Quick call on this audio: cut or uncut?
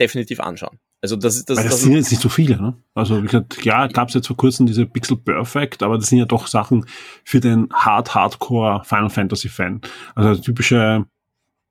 uncut